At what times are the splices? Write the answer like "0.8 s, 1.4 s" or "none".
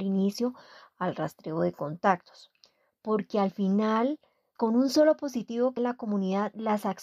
4.6 s, 5.8 s